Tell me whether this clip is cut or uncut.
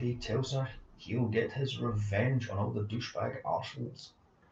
uncut